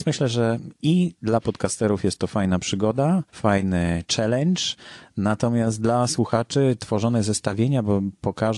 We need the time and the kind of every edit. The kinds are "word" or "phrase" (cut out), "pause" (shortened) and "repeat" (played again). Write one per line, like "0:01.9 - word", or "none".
0:03.3 - pause